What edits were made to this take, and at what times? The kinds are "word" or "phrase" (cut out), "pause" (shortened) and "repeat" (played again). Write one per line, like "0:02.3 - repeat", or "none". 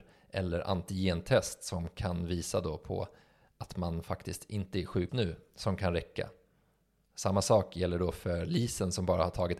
0:05.1 - word